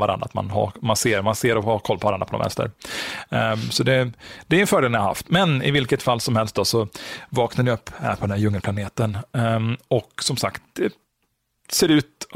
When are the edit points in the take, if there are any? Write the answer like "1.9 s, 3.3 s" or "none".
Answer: none